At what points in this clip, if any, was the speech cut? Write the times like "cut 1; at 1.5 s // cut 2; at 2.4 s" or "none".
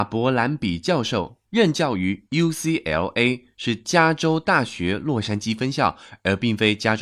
cut 1; at 1.4 s

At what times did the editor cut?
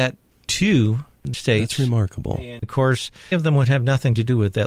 cut 1; at 1.3 s // cut 2; at 2.6 s // cut 3; at 3.3 s

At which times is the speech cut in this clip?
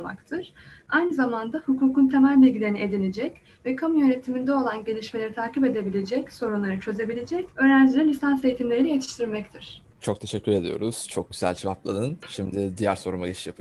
cut 1; at 7.5 s // cut 2; at 9.9 s

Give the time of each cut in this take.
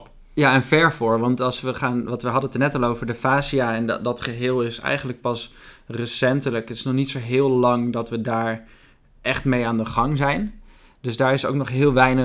none

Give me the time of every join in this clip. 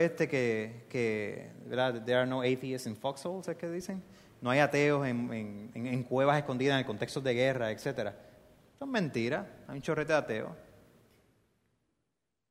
none

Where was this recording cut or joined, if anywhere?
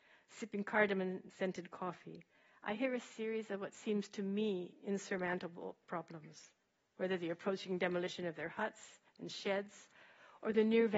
none

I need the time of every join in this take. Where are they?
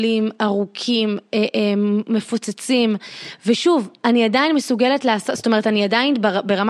none

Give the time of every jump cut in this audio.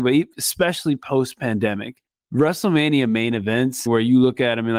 cut 1; at 2.1 s // cut 2; at 3.9 s

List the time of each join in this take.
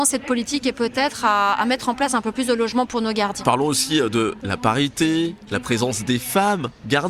none

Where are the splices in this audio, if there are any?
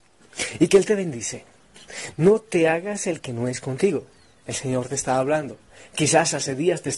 none

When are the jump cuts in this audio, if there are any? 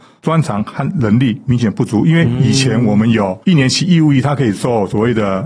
cut 1; at 3.4 s

